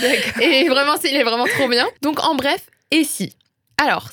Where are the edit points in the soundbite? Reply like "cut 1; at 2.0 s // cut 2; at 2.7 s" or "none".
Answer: cut 1; at 2.0 s